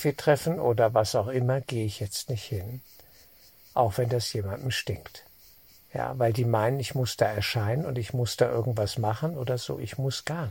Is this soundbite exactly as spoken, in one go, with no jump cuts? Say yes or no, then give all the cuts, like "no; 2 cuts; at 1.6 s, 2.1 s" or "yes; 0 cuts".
yes; 0 cuts